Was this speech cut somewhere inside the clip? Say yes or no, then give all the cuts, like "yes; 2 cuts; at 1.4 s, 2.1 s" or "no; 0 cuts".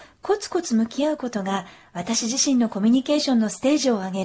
no; 0 cuts